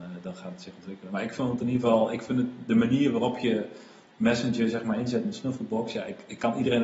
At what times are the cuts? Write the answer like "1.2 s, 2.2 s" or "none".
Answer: none